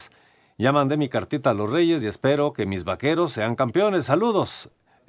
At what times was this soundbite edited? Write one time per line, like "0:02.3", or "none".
none